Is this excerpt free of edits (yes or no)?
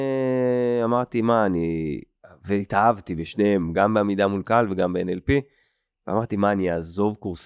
yes